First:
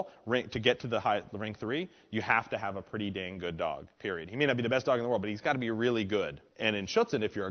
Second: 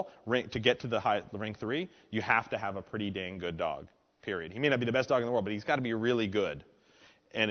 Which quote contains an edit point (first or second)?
first